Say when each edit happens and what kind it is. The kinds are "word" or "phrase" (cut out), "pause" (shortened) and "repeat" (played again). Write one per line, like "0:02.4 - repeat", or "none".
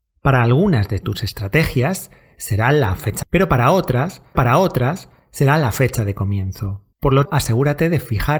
0:03.2 - word
0:04.3 - repeat
0:06.9 - pause
0:07.2 - word